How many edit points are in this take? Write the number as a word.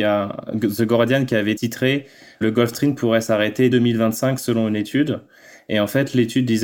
one